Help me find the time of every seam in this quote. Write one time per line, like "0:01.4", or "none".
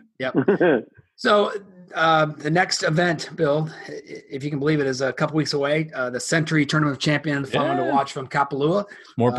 0:07.4